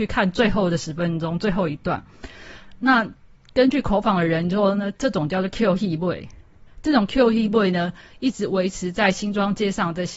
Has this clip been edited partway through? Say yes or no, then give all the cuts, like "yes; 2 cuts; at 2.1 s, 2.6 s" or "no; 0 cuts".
no; 0 cuts